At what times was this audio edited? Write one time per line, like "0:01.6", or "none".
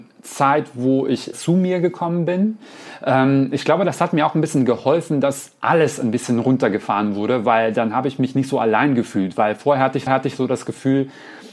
0:01.3
0:10.1